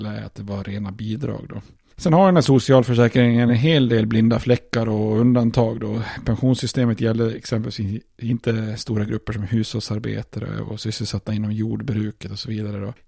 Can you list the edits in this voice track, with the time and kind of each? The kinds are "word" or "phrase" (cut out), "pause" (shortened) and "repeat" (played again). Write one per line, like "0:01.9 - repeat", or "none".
none